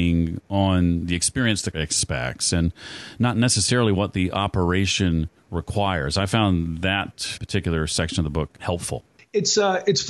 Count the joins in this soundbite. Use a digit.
2